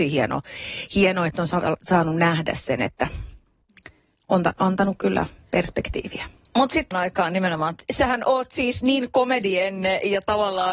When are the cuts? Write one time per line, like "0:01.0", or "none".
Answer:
0:06.9